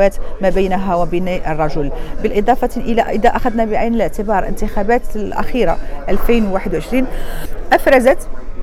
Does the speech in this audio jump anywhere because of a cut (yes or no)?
no